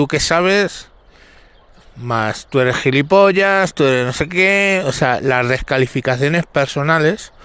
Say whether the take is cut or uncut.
uncut